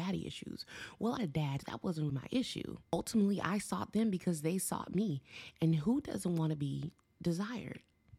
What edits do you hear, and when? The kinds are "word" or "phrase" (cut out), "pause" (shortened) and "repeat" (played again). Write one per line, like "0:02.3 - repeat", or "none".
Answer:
0:01.2 - word
0:01.6 - word
0:02.1 - word
0:02.8 - pause